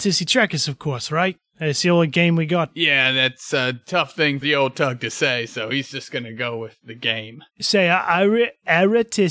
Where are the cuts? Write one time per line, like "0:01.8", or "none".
0:04.4
0:07.5